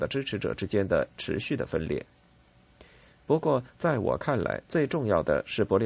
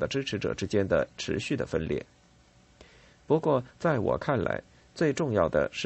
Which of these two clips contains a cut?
first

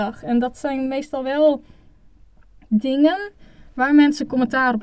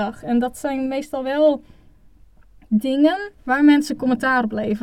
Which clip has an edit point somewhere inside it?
second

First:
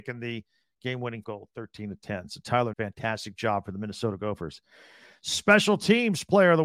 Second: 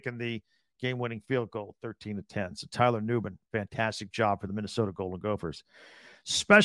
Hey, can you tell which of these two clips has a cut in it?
first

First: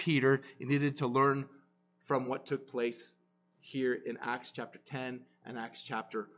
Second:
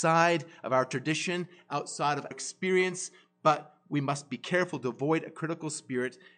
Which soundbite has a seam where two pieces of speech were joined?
second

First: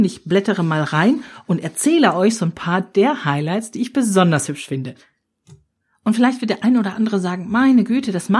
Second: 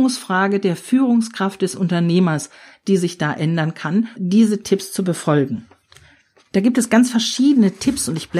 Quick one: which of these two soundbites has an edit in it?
second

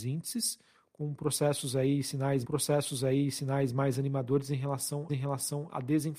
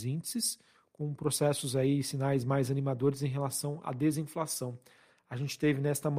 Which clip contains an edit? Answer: first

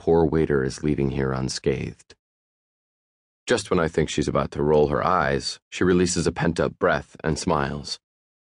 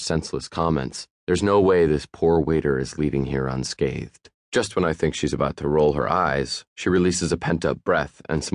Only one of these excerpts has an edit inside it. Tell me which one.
second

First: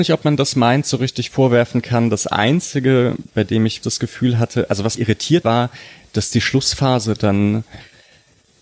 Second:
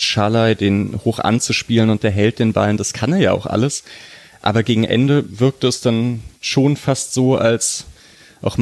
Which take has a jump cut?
first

